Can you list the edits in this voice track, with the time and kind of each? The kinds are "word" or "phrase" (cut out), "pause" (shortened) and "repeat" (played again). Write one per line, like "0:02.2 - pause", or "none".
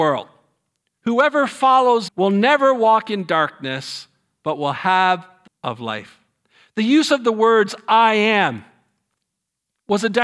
0:02.1 - word
0:05.5 - word